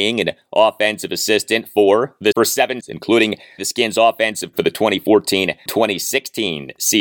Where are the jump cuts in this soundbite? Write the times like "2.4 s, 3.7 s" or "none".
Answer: 2.3 s, 2.8 s, 3.6 s, 4.5 s, 5.7 s

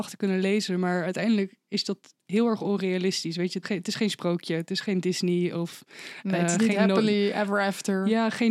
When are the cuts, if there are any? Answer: 3.6 s

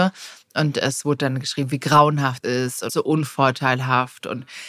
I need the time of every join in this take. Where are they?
2.4 s, 2.9 s

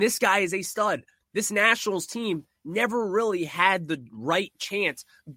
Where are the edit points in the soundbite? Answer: none

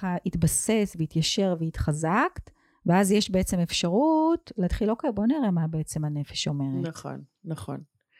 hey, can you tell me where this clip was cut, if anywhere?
none

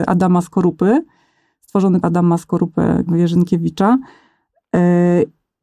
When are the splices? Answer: 2.0 s, 3.1 s

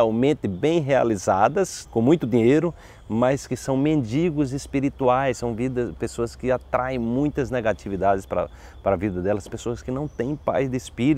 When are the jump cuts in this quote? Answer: 1.8 s

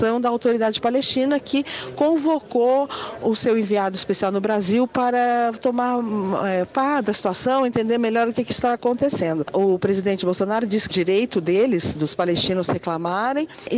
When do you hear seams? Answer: 10.9 s

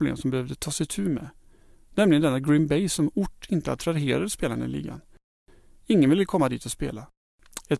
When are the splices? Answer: none

